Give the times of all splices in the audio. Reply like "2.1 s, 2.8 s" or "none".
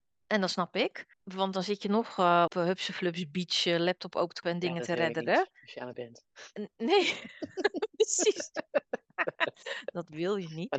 1.1 s, 2.5 s, 4.4 s, 5.9 s